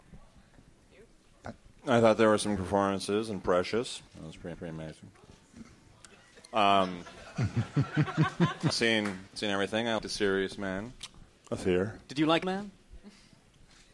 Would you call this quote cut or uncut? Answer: cut